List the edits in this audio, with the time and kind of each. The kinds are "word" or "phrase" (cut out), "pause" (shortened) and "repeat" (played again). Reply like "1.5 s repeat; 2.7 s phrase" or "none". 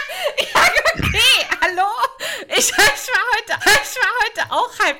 3.6 s repeat